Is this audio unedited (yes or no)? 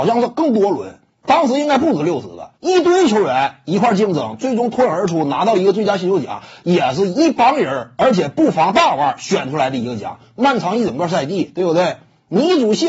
no